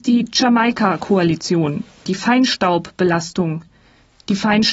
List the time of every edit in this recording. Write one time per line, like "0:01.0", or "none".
0:02.1